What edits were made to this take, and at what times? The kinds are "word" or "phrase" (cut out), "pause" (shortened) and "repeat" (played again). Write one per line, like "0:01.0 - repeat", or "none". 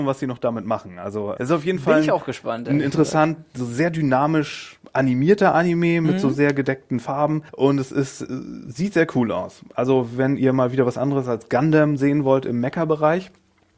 0:01.4 - word
0:07.5 - pause